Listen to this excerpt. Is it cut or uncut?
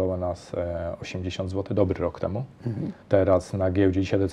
cut